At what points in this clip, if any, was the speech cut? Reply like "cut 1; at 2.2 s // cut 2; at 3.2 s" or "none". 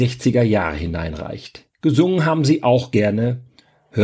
cut 1; at 1.7 s